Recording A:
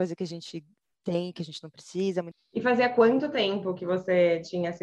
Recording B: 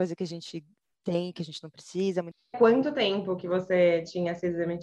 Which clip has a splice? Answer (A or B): B